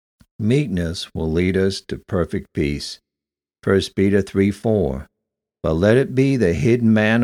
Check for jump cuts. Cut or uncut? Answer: uncut